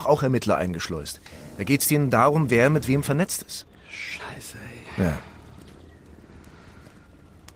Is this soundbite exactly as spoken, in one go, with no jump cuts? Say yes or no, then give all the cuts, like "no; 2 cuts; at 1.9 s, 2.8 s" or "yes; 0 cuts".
yes; 0 cuts